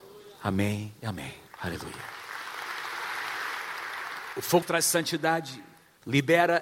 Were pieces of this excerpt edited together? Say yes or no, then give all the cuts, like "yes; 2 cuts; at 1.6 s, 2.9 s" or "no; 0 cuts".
yes; 1 cut; at 4.6 s